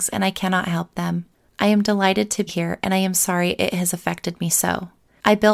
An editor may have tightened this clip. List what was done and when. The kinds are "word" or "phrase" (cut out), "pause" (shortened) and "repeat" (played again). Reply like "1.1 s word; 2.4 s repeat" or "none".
2.5 s word